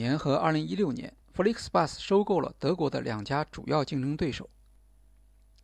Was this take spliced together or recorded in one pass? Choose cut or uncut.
cut